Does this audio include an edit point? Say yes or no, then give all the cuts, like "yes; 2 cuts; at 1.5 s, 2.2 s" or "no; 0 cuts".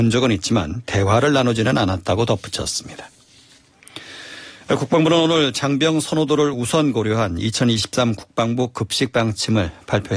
no; 0 cuts